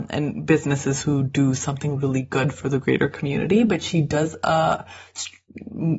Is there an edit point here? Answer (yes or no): no